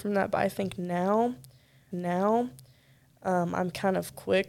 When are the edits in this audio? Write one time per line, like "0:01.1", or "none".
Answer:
0:01.9